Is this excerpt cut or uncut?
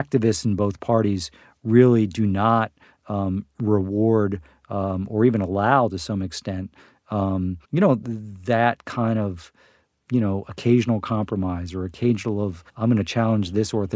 cut